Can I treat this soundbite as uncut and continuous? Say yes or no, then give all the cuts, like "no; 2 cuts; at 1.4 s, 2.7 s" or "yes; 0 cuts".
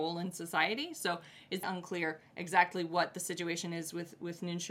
no; 1 cut; at 1.6 s